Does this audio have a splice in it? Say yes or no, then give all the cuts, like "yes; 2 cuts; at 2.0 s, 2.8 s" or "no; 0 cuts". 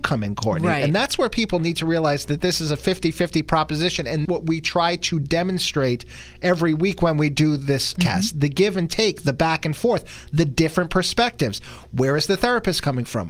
yes; 2 cuts; at 4.2 s, 7.9 s